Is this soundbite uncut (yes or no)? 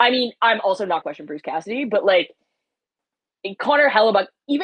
no